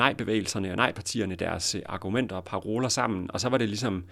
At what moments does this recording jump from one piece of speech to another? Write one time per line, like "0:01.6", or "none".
none